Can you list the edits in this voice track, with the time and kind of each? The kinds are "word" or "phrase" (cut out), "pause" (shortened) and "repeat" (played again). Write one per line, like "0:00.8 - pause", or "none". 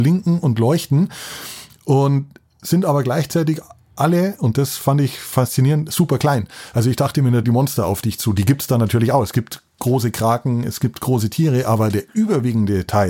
0:07.4 - phrase